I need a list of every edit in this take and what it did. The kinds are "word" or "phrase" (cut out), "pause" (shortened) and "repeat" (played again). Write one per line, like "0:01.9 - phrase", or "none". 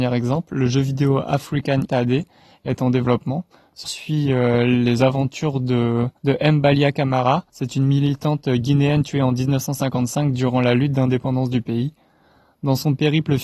0:01.9 - phrase
0:03.8 - phrase
0:06.2 - pause
0:07.5 - pause